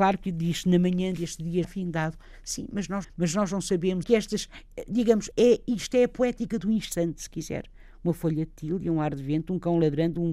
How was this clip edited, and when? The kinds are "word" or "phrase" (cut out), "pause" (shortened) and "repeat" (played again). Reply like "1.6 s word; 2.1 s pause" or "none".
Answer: 1.6 s word; 3.0 s phrase; 4.0 s phrase; 5.3 s word

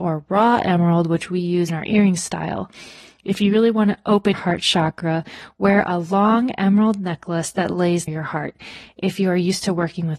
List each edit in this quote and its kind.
1.7 s word; 4.3 s word; 8.1 s word

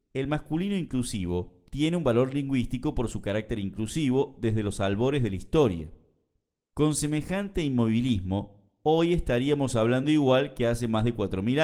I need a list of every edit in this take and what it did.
none

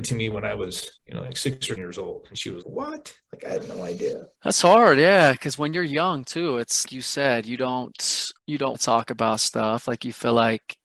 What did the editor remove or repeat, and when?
1.0 s pause; 1.8 s word; 2.6 s word; 4.3 s pause; 6.8 s word; 8.4 s pause; 8.7 s word

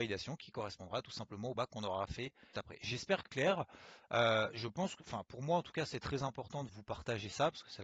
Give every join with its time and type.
1.6 s word; 2.5 s word; 3.3 s word; 6.7 s word

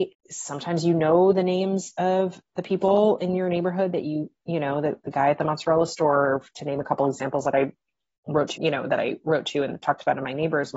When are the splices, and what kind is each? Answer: 8.6 s phrase

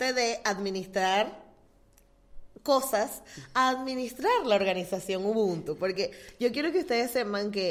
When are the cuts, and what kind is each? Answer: none

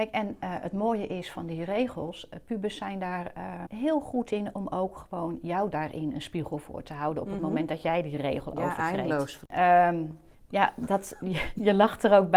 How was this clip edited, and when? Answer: 3.7 s word; 10.3 s pause

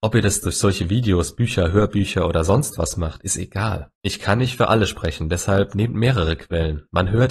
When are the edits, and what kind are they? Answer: 3.9 s pause

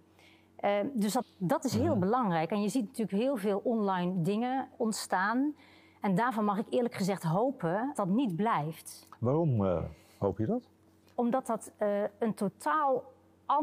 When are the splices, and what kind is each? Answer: 1.2 s word; 4.7 s word; 7.9 s word

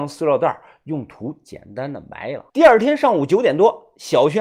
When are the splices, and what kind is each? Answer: 2.5 s pause

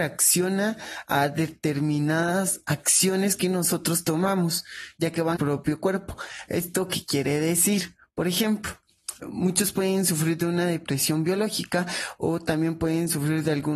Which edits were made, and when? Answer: 5.4 s phrase; 9.2 s word

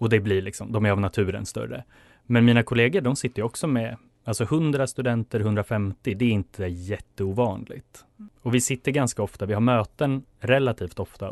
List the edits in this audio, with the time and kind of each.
none

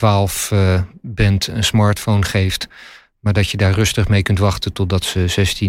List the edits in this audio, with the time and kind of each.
none

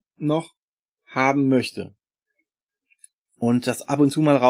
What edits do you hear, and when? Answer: none

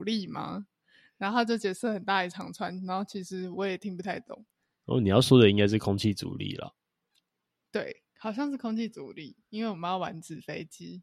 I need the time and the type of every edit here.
none

